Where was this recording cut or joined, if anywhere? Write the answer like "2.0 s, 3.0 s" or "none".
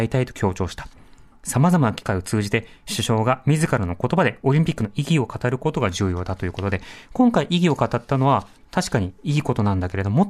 none